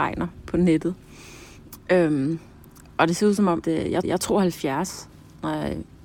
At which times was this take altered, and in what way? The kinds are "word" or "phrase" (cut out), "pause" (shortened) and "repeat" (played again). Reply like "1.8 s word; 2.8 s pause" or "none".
3.6 s word; 4.0 s repeat